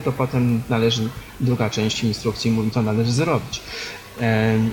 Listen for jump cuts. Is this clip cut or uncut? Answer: cut